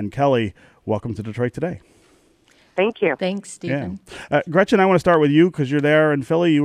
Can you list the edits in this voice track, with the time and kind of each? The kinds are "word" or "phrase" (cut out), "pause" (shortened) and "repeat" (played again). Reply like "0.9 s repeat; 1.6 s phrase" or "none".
none

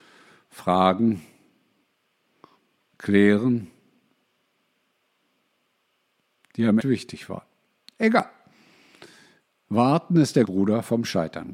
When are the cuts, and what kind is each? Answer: 6.8 s phrase; 10.5 s word

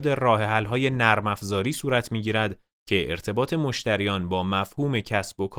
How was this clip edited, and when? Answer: none

